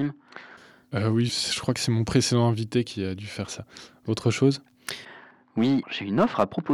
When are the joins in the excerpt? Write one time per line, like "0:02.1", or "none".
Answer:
0:01.3
0:05.8